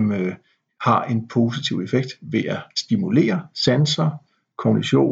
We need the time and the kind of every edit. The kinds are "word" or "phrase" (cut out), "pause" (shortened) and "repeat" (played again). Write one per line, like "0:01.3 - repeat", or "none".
0:02.7 - pause